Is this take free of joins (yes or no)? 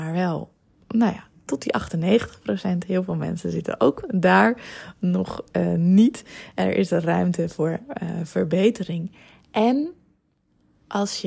yes